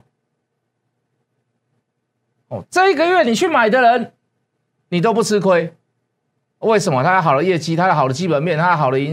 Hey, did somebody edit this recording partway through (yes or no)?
no